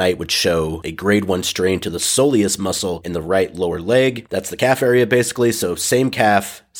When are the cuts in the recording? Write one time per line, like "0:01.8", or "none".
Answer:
none